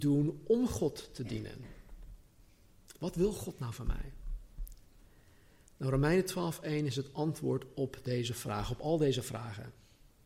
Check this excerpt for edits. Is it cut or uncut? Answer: uncut